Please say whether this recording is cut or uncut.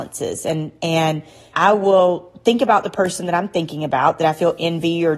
uncut